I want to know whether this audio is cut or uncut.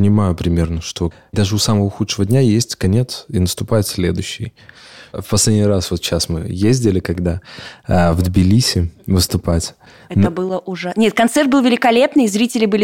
uncut